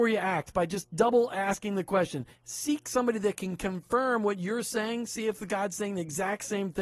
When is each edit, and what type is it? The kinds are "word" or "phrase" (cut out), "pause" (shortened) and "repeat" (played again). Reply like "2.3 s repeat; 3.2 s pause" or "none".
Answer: none